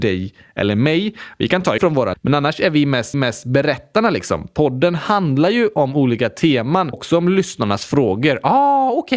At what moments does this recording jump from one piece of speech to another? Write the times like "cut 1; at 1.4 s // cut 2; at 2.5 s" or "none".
cut 1; at 1.8 s // cut 2; at 2.1 s // cut 3; at 3.1 s // cut 4; at 6.9 s